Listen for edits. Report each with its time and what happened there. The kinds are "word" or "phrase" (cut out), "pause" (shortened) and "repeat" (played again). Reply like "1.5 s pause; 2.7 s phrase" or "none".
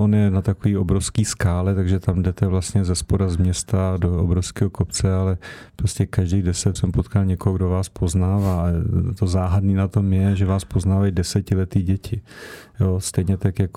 6.8 s word